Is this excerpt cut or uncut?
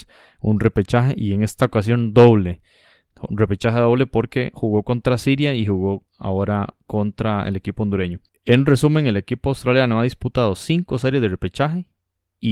cut